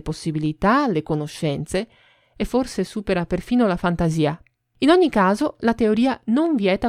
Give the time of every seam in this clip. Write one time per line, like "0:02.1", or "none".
none